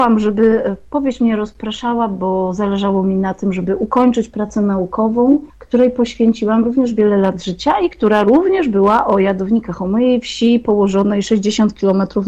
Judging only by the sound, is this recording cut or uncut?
cut